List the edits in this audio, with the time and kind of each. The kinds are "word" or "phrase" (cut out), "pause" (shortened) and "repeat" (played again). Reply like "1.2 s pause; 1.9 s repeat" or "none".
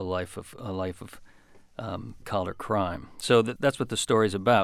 2.2 s word; 3.6 s word